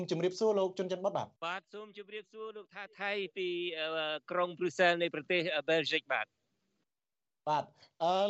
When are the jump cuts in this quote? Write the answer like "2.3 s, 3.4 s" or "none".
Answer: 1.4 s